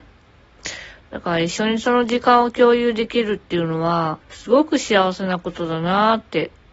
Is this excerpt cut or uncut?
cut